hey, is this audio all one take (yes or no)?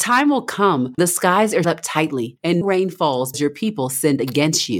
no